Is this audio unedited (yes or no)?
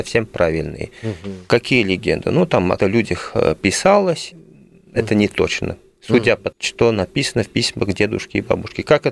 no